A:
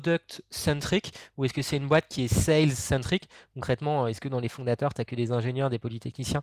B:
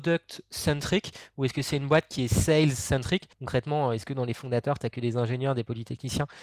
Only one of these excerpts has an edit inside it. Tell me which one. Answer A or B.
B